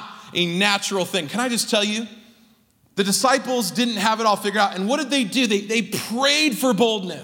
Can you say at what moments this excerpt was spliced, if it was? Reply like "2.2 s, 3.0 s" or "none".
none